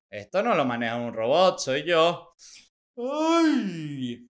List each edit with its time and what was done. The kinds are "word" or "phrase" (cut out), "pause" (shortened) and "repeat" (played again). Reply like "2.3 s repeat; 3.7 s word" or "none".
none